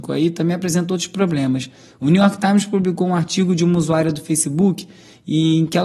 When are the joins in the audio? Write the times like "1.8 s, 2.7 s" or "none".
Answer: none